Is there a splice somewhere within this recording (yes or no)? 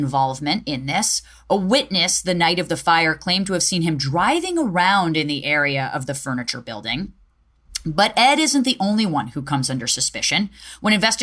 no